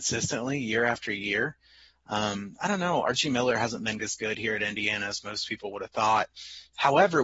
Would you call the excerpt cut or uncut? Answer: cut